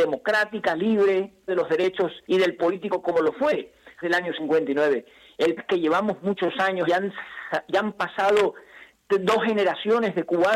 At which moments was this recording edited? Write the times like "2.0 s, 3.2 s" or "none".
1.5 s, 2.2 s, 2.6 s, 4.0 s, 5.6 s, 6.9 s